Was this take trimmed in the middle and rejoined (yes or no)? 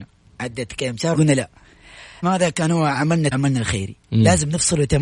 yes